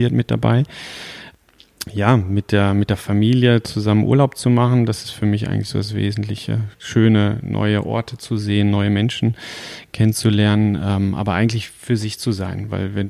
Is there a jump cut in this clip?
yes; 1 cut; at 6.7 s

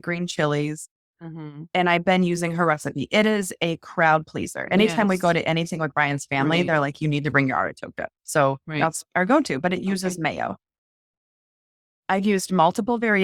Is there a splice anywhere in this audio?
no; 0 cuts

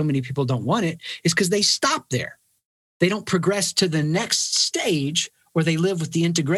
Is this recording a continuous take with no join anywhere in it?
yes; 0 cuts

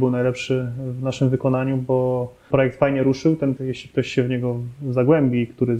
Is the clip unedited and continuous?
no; 2 cuts; at 2.5 s, 3.6 s

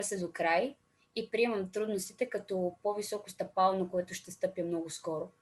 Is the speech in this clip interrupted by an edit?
no; 0 cuts

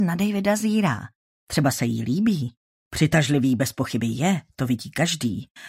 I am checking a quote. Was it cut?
no; 0 cuts

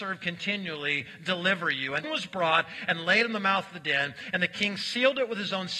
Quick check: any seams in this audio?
yes; 1 cut; at 2.0 s

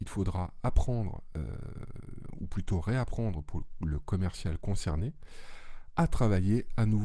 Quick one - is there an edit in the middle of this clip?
no; 0 cuts

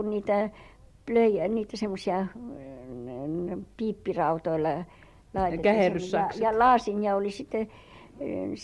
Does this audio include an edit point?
no; 0 cuts

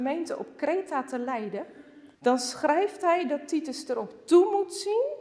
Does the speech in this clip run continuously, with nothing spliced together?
no; 1 cut; at 2.1 s

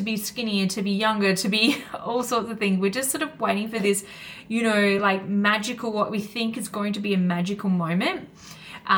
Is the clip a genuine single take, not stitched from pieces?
yes; 0 cuts

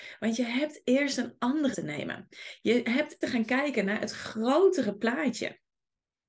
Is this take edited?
yes; 2 cuts; at 1.7 s, 3.2 s

